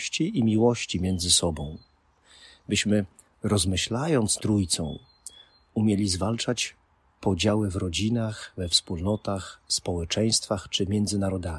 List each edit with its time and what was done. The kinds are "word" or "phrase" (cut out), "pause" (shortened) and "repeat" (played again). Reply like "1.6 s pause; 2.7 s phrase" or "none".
4.4 s word